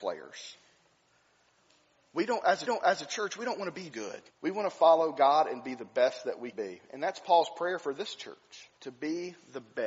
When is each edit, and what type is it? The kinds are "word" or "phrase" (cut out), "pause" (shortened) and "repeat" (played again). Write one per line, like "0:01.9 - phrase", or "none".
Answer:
0:02.7 - repeat
0:03.9 - word
0:04.3 - pause
0:06.5 - word
0:08.8 - pause